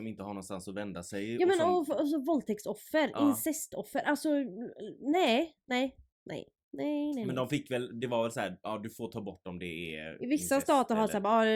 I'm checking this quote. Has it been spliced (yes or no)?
no